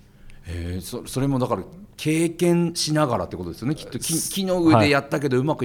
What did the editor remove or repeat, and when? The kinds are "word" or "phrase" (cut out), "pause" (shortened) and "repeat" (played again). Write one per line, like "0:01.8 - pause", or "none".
0:01.9 - pause